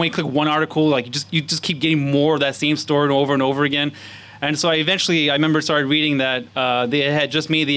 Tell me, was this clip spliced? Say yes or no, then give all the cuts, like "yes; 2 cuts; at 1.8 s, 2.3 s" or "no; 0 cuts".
no; 0 cuts